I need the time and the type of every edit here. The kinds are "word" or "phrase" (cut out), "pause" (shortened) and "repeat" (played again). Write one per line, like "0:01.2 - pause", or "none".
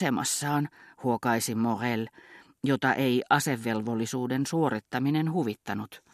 none